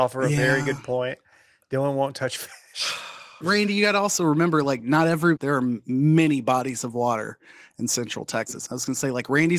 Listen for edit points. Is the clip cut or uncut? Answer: cut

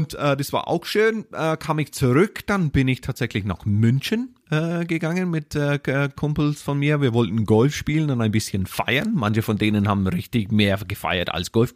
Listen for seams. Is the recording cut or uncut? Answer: uncut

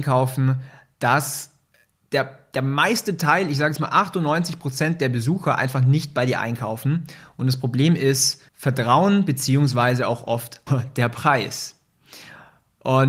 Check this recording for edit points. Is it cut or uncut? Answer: cut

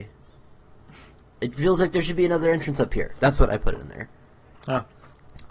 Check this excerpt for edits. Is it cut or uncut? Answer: uncut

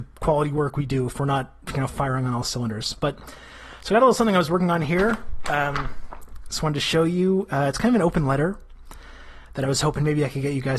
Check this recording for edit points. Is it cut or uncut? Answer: uncut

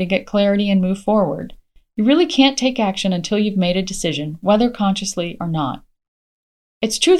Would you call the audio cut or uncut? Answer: uncut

